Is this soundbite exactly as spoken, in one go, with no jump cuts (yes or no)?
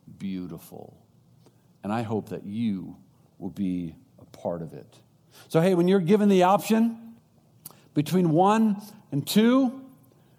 yes